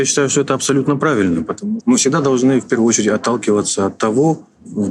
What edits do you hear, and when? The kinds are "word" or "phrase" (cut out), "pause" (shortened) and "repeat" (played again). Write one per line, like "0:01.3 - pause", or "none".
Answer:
0:01.8 - word